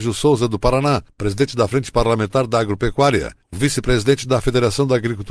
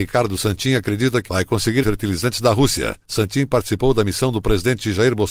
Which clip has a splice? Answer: second; 2 cuts; at 1.3 s, 1.8 s

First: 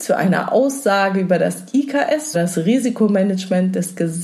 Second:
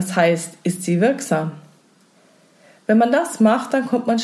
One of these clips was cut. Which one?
first; 1 cut; at 2.3 s

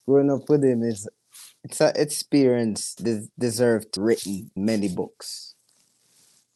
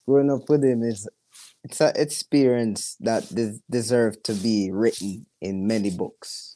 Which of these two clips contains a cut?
first; 3 cuts; at 3.0 s, 4.0 s, 4.6 s

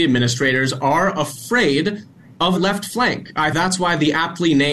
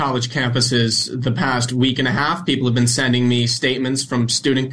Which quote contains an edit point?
first; 2 cuts; at 2.6 s, 3.5 s

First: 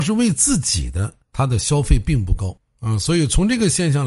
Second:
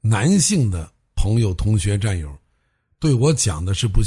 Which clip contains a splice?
first; 1 cut; at 1.2 s

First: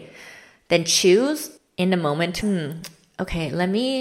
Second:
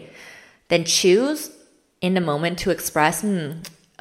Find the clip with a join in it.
first; 2 cuts; at 1.6 s, 2.4 s

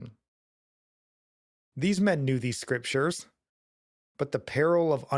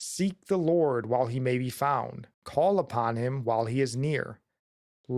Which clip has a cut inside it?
second; 1 cut; at 2.3 s

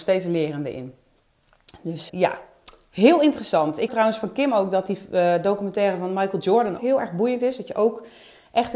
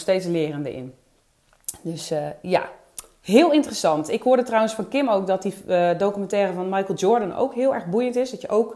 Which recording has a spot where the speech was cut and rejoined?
first; 3 cuts; at 2.1 s, 3.9 s, 6.8 s

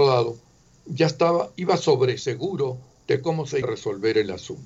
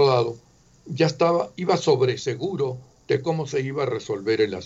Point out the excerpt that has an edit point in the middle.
first; 1 cut; at 3.6 s

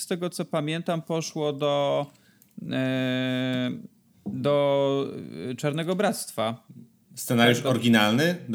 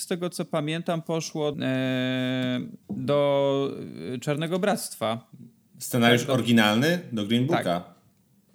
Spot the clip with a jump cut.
second; 2 cuts; at 1.5 s, 2.8 s

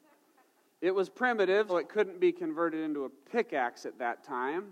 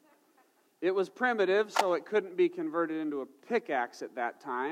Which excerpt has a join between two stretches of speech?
first; 1 cut; at 1.7 s

